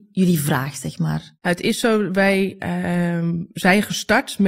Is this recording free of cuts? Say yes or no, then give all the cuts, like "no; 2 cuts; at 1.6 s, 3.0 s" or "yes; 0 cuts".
yes; 0 cuts